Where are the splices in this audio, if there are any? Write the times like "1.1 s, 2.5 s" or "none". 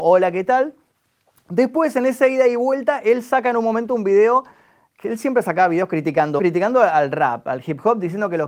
6.4 s